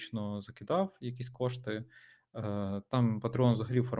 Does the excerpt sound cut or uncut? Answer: uncut